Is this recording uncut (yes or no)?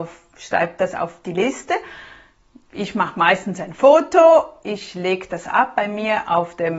yes